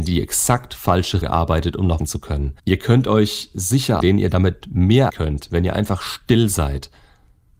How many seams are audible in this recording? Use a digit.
5